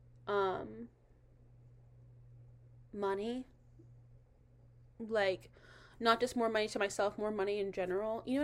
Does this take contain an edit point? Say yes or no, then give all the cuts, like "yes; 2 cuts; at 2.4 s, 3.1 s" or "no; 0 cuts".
no; 0 cuts